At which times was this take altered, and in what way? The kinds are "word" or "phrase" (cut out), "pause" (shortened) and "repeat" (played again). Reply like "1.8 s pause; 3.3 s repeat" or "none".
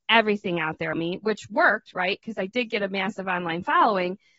0.9 s word